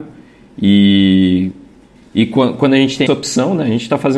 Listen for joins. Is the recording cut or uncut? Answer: cut